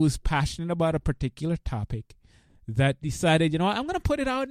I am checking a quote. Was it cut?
no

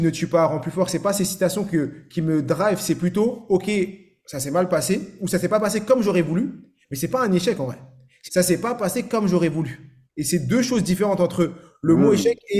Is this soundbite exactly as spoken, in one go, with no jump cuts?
no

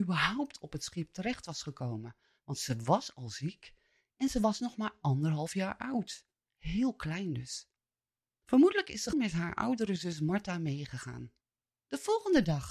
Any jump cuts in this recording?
yes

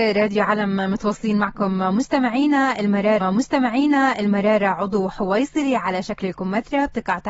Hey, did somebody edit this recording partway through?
yes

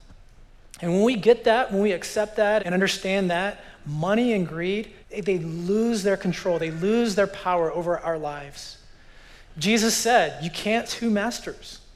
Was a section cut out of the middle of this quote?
yes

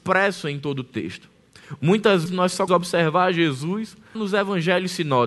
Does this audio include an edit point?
yes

